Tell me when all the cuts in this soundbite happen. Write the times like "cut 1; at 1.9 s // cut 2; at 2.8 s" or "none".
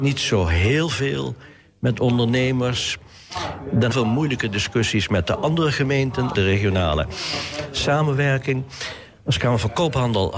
cut 1; at 3.9 s // cut 2; at 6.3 s